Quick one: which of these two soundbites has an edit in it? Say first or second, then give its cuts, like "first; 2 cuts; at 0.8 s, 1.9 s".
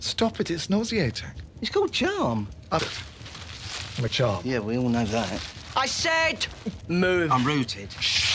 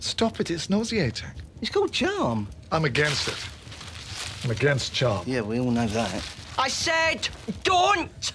first; 3 cuts; at 2.8 s, 4.1 s, 6.8 s